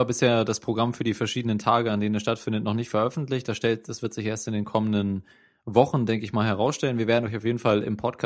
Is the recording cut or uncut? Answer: uncut